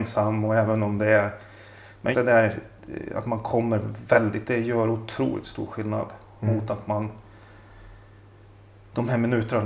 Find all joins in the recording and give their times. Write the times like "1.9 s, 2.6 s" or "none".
2.1 s, 4.4 s